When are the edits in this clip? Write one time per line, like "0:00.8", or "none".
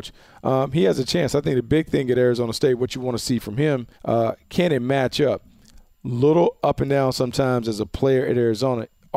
0:03.9